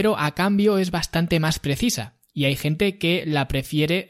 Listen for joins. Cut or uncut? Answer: uncut